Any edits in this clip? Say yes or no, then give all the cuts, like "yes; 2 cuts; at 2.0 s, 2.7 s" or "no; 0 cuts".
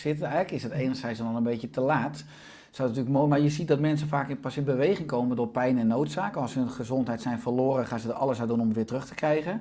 no; 0 cuts